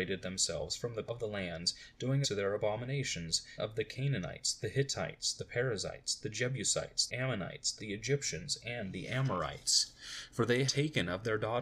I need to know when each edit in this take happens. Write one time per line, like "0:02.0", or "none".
0:01.1
0:02.2
0:03.6
0:07.1
0:07.8
0:10.7

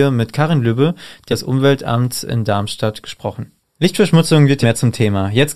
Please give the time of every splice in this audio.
0:01.3
0:04.6

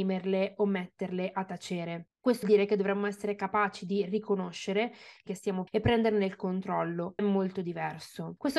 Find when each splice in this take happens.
0:02.4
0:05.3
0:05.7
0:07.2

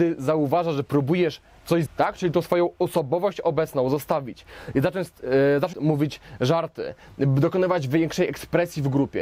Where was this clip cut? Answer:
0:01.9
0:05.7

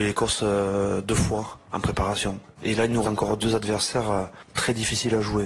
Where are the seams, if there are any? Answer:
0:03.0
0:03.4

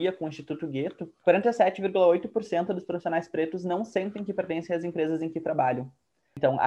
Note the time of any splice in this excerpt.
0:01.2

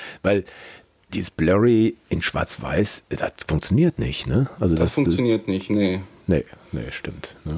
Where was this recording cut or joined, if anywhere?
none

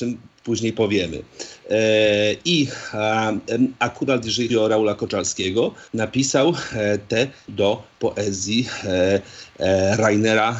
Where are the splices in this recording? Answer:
0:04.5
0:05.9
0:07.5

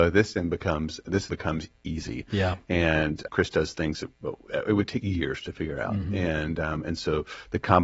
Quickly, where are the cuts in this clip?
0:01.3
0:03.3
0:04.1
0:05.0

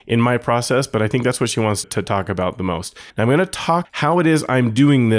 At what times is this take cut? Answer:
0:01.8
0:03.1
0:03.8

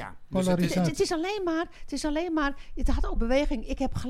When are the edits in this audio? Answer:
0:03.2

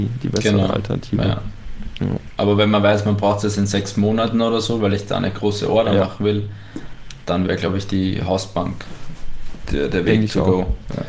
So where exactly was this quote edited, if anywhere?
none

